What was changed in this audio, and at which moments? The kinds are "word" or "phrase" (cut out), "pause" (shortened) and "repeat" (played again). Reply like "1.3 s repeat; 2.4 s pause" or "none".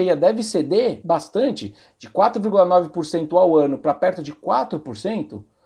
none